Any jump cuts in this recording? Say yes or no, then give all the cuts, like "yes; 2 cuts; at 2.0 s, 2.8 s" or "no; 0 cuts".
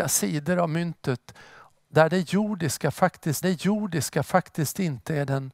yes; 1 cut; at 3.4 s